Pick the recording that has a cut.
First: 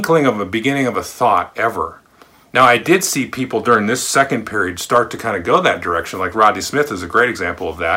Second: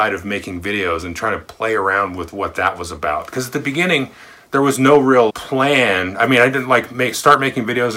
second; 1 cut; at 5.3 s

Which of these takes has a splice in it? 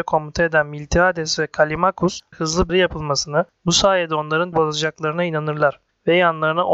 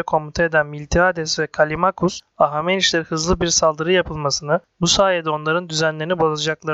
first; 3 cuts; at 2.3 s, 2.7 s, 4.5 s

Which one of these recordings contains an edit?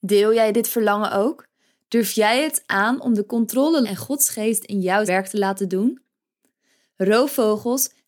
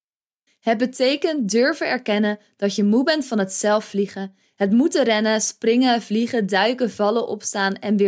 first; 2 cuts; at 3.8 s, 5.1 s

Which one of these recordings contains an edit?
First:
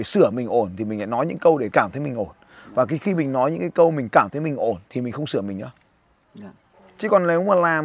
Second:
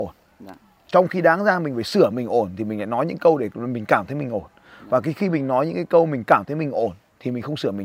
first; 2 cuts; at 1.7 s, 4.8 s

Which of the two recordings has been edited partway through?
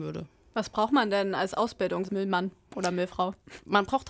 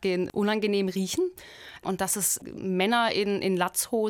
first; 1 cut; at 2.1 s

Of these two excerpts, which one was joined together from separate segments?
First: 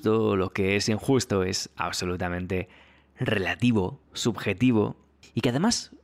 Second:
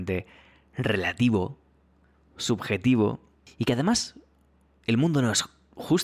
first; 1 cut; at 4.0 s

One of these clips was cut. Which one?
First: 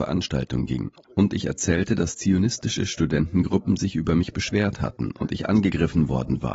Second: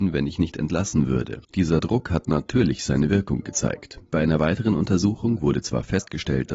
second; 1 cut; at 1.4 s

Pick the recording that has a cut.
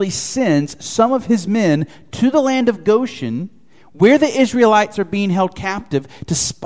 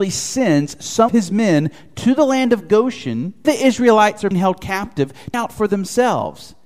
second; 4 cuts; at 1.1 s, 3.4 s, 4.3 s, 5.3 s

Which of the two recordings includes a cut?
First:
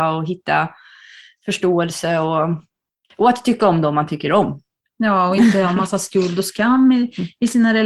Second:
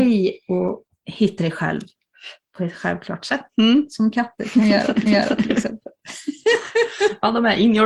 second; 3 cuts; at 1.4 s, 3.5 s, 5.1 s

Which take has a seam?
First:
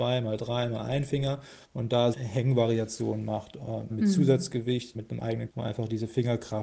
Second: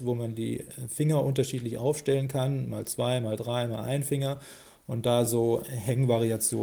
first; 5 cuts; at 1.6 s, 2.1 s, 3.9 s, 4.9 s, 5.5 s

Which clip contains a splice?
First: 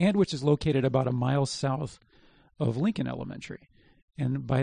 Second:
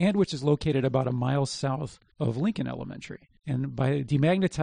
second; 2 cuts; at 2.1 s, 3.4 s

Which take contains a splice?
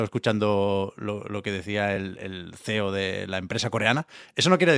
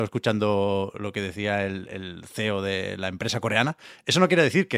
second; 1 cut; at 0.9 s

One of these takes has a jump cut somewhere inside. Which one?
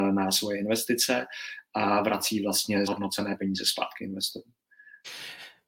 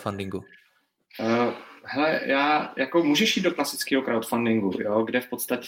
first; 1 cut; at 2.8 s

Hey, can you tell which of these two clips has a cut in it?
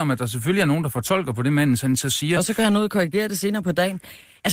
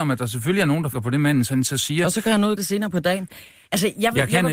second; 2 cuts; at 0.9 s, 2.6 s

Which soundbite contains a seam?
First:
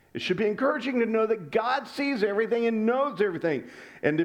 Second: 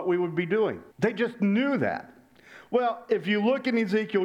second; 1 cut; at 0.9 s

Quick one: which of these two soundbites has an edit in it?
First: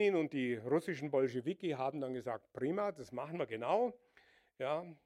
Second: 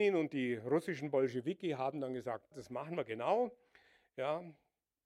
second; 1 cut; at 2.5 s

